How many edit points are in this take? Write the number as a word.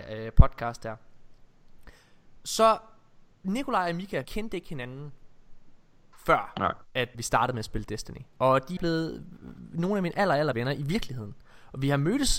four